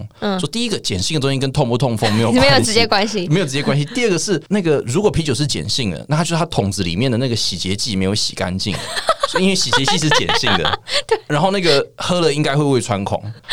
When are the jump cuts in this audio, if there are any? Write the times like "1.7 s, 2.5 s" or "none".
4.5 s

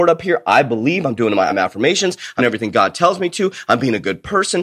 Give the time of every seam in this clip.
1.5 s, 2.4 s

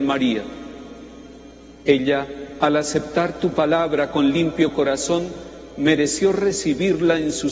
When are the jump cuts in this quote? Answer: none

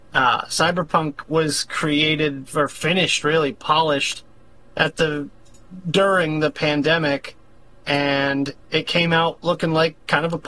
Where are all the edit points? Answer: none

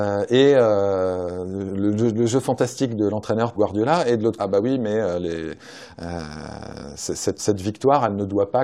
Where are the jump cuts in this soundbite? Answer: 3.5 s, 4.4 s, 7.4 s

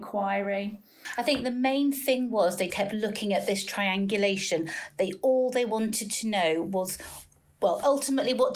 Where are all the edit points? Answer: 2.7 s

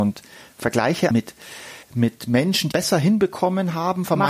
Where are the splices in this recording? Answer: 1.1 s, 1.8 s, 2.7 s

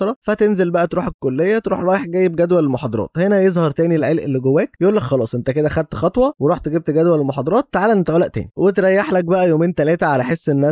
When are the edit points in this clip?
none

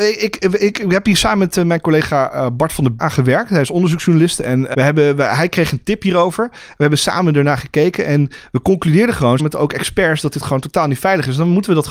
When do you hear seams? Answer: 3.0 s, 4.7 s, 9.4 s

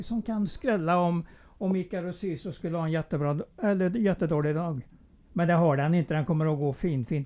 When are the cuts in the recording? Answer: none

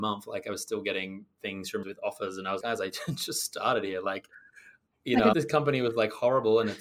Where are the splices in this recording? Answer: 1.8 s, 2.6 s, 5.3 s

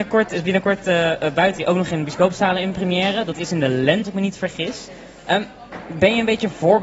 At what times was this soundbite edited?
1.6 s, 4.0 s

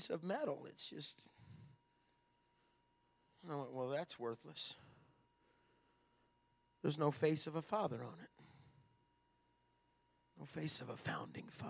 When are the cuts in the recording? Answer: none

